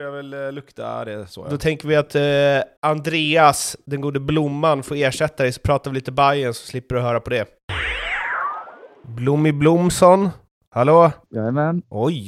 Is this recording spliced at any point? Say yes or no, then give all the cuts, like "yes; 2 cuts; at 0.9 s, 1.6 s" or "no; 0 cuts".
yes; 2 cuts; at 2.8 s, 11.2 s